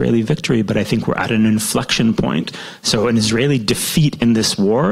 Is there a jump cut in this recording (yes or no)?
no